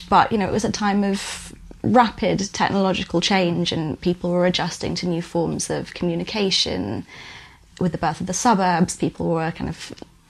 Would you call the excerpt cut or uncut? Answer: uncut